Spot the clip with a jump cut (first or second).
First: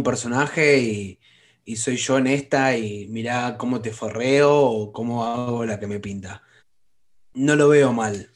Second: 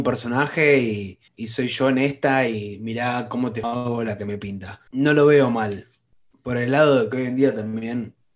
second